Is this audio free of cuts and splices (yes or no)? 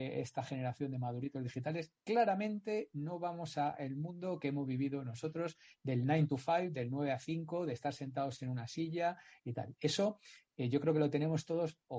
yes